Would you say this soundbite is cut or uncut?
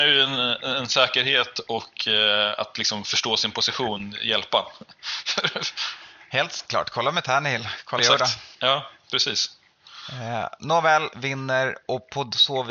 cut